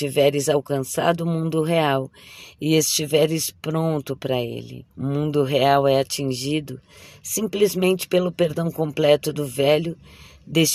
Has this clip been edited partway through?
yes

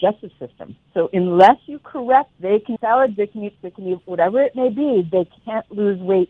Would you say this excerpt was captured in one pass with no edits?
no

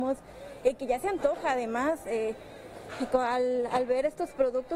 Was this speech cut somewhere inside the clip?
no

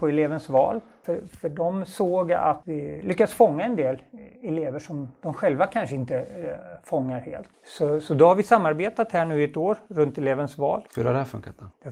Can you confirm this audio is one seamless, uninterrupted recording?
no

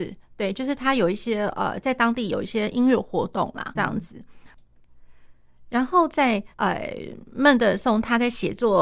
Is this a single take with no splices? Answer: no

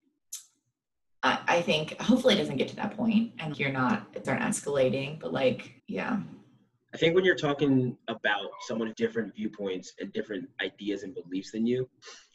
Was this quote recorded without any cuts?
no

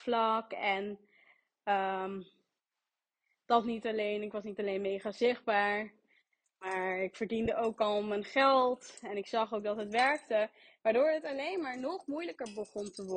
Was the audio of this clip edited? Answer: no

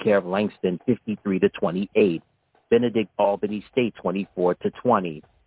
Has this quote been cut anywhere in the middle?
yes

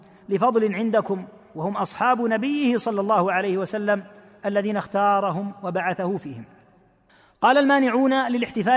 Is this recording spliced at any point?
no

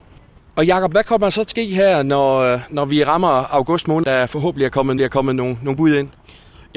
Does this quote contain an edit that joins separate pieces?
yes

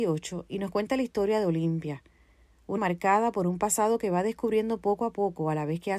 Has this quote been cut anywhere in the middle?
yes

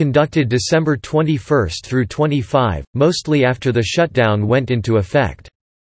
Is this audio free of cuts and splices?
yes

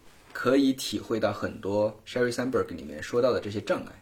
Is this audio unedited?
yes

